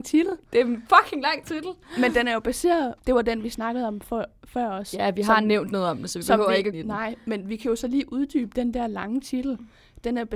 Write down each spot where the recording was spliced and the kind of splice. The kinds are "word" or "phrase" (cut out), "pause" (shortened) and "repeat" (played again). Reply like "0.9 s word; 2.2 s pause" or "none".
3.0 s pause; 6.7 s phrase